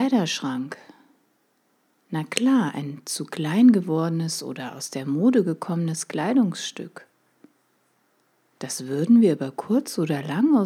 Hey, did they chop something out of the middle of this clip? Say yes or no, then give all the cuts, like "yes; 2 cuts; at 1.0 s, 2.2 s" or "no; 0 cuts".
no; 0 cuts